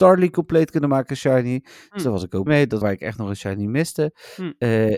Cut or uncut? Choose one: cut